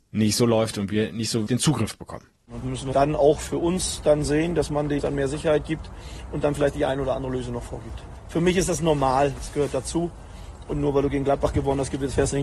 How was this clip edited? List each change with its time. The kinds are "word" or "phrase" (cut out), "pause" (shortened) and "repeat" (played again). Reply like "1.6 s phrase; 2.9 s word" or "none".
1.5 s word; 2.6 s word; 2.9 s word; 5.0 s word

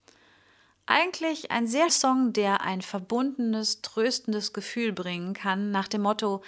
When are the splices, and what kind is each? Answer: 1.9 s word

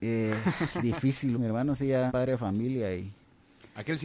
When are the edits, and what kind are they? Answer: 1.3 s word; 2.1 s word

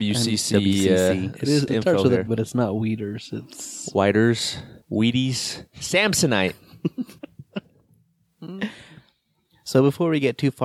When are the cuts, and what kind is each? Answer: 1.7 s word; 2.3 s word; 4.8 s pause; 7.2 s pause

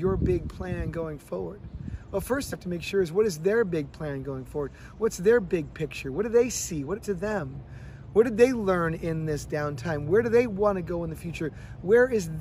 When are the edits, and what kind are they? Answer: 2.5 s word; 7.0 s word

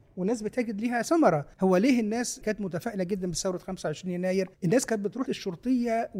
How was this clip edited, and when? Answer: 1.5 s pause; 2.4 s word; 4.5 s pause; 5.3 s word

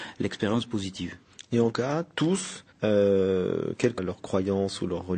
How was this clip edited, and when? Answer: 1.7 s word; 2.7 s pause; 4.0 s word

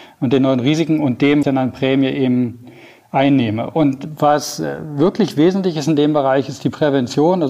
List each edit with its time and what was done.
1.4 s phrase

